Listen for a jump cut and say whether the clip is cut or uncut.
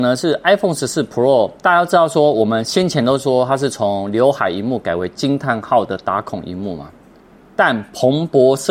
uncut